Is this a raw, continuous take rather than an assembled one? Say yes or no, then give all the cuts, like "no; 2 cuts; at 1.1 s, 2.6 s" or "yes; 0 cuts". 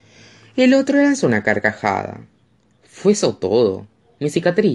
yes; 0 cuts